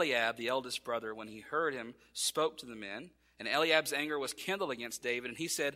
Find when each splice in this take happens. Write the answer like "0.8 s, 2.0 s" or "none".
none